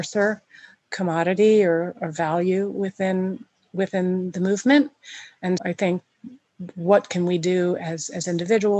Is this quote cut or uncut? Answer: cut